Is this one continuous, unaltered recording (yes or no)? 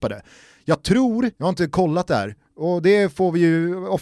no